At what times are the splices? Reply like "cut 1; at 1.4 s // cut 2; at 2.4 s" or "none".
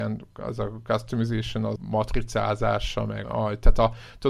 cut 1; at 1.8 s // cut 2; at 3.2 s